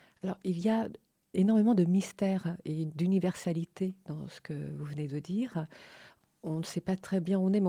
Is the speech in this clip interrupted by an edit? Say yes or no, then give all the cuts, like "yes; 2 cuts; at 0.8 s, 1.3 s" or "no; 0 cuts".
no; 0 cuts